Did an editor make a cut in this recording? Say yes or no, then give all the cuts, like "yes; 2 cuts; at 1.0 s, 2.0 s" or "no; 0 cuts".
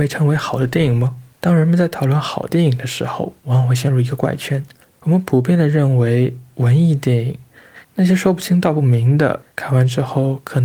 yes; 4 cuts; at 1.3 s, 4.8 s, 7.8 s, 9.5 s